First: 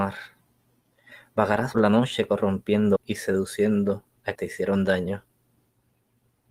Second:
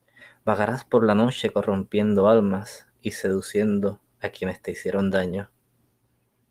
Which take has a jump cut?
first; 3 cuts; at 1.7 s, 3.0 s, 4.3 s

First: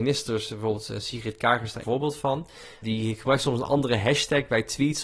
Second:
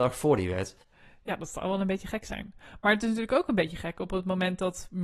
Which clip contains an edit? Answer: first; 2 cuts; at 1.8 s, 2.8 s

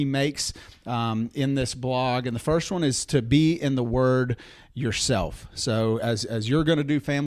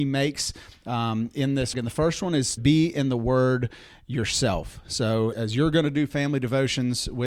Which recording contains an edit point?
second; 3 cuts; at 1.7 s, 2.6 s, 5.3 s

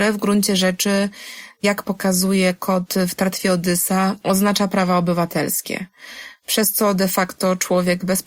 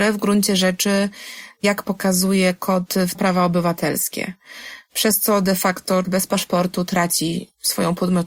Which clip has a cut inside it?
second; 2 cuts; at 3.1 s, 6.0 s

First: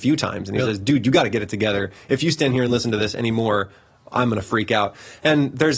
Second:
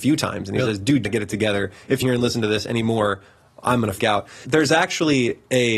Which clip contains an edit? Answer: second; 4 cuts; at 1.0 s, 2.0 s, 4.0 s, 4.4 s

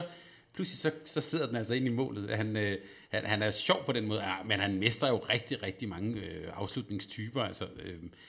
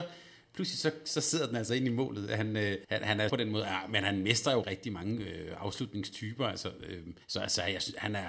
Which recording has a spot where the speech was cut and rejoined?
second; 4 cuts; at 2.8 s, 3.3 s, 4.6 s, 7.2 s

